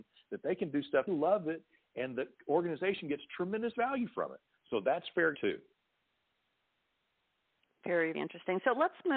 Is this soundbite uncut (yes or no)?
no